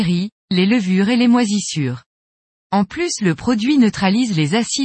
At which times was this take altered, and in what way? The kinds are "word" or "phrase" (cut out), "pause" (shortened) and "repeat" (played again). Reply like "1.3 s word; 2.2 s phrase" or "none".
none